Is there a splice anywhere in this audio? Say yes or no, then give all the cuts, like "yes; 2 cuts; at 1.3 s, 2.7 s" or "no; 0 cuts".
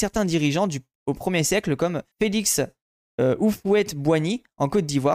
yes; 1 cut; at 2.1 s